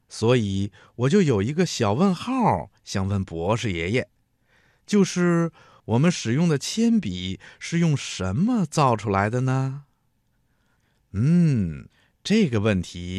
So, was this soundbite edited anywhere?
no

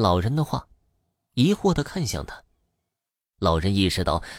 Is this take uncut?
yes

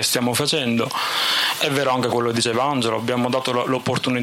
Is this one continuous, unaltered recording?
yes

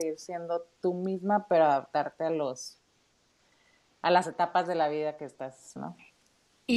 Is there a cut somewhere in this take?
yes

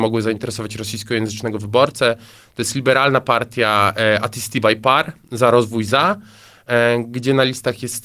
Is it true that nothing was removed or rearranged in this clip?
yes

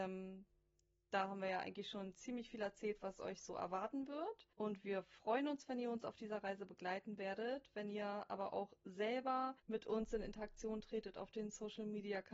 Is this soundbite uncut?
no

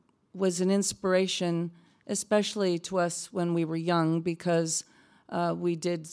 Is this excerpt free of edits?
yes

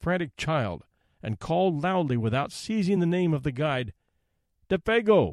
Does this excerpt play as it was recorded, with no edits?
yes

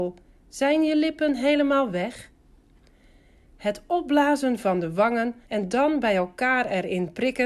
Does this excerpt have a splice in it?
yes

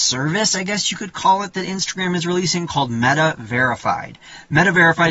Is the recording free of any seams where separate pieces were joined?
yes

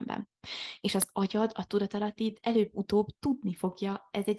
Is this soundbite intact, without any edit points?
yes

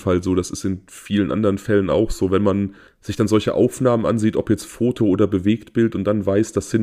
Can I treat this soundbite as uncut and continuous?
no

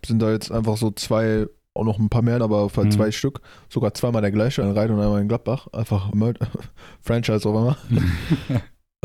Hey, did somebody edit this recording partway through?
yes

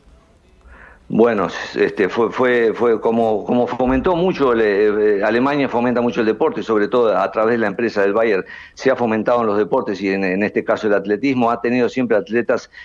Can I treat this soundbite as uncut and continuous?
yes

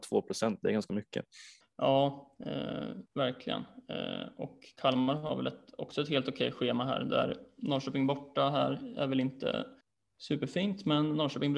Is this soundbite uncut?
no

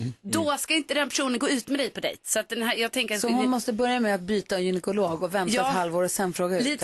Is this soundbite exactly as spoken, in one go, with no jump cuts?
yes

